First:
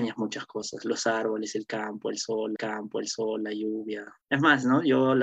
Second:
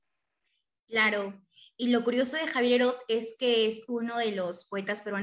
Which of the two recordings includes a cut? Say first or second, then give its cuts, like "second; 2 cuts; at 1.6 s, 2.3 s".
first; 2 cuts; at 2.6 s, 4.2 s